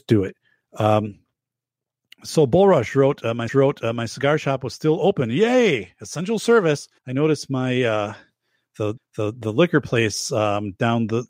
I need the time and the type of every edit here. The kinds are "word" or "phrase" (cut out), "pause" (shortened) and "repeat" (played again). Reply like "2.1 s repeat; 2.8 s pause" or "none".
3.5 s repeat; 7.0 s pause; 9.0 s repeat

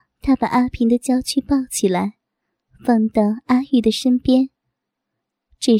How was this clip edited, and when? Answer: none

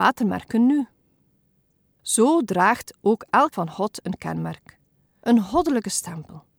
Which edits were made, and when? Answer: 3.5 s word

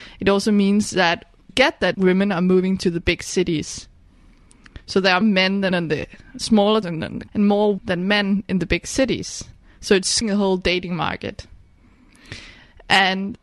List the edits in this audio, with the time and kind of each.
1.5 s word; 1.9 s word; 5.2 s word; 5.7 s word; 6.8 s word; 7.3 s word; 7.8 s word; 10.2 s word

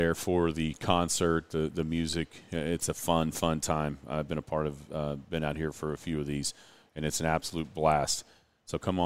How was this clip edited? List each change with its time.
none

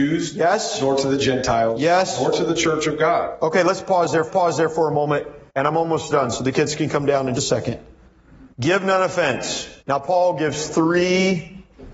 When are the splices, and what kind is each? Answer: 4.3 s repeat; 5.5 s pause; 7.4 s word; 8.5 s pause; 9.8 s pause

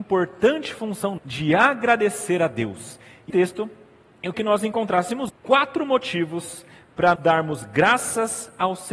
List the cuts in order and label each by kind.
1.2 s word; 3.3 s word; 4.3 s word; 5.3 s word; 7.2 s word

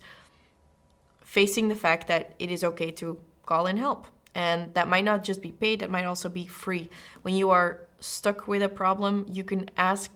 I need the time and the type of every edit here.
none

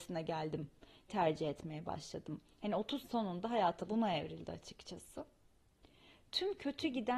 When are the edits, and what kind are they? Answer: 1.1 s word; 3.0 s word; 3.9 s word

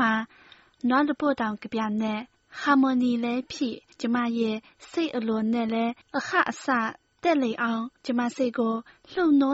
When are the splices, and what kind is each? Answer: 2.4 s pause; 3.9 s pause; 6.0 s pause; 8.0 s pause

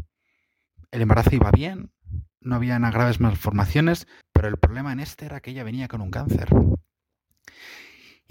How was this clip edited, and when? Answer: 4.2 s pause

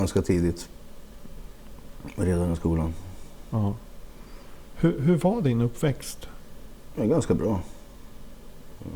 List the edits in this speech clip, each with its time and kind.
none

